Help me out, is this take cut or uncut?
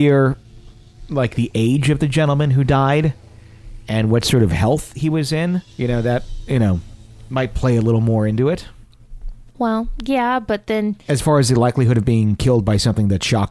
cut